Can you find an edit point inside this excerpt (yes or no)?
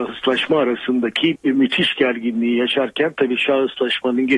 yes